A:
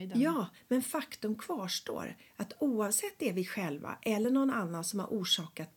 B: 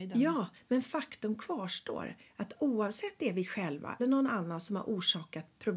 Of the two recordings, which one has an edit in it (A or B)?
B